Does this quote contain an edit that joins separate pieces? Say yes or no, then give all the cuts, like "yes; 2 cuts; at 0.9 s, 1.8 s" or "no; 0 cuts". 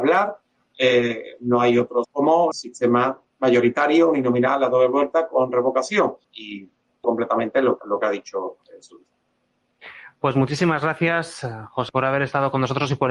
yes; 6 cuts; at 2.0 s, 2.5 s, 6.2 s, 7.0 s, 7.8 s, 11.9 s